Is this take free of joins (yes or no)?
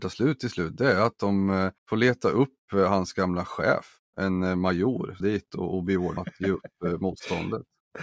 no